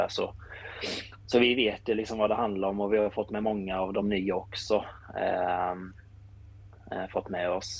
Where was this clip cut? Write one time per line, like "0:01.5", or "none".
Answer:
none

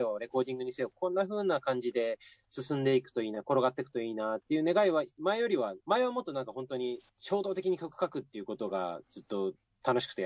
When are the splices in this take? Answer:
0:05.8

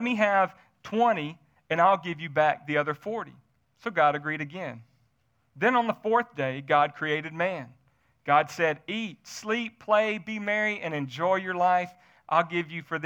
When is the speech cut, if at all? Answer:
none

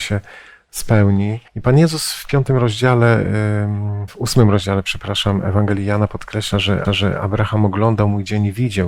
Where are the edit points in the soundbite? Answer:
0:01.5
0:04.1
0:06.8

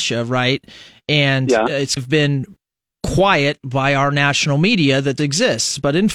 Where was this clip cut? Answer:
0:02.0
0:05.2

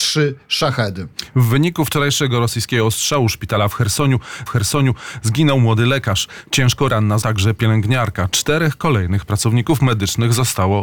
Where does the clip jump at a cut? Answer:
0:04.5
0:07.2

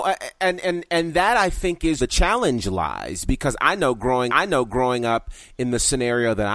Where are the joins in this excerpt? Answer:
0:02.0
0:04.3

